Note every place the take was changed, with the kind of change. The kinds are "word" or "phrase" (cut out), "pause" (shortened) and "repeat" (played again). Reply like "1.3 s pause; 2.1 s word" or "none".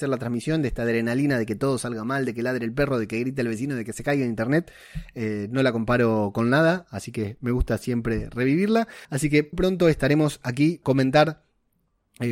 9.0 s pause; 9.5 s word; 10.8 s word